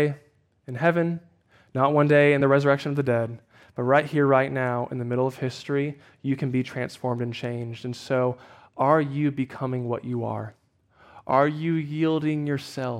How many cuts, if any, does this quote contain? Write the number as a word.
zero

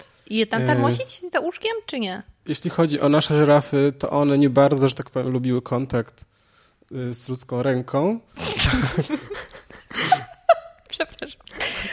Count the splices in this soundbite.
zero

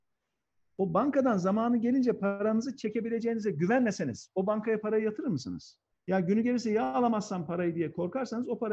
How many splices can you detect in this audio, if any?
one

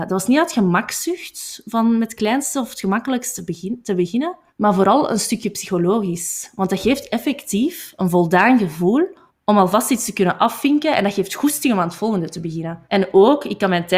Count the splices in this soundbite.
three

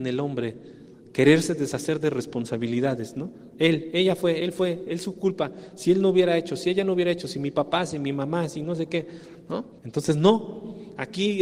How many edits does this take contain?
one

